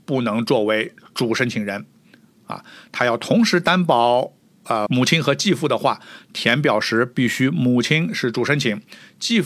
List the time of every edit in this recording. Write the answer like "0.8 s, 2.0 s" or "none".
4.9 s